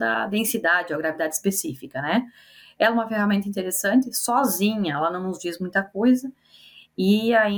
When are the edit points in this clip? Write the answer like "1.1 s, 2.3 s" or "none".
none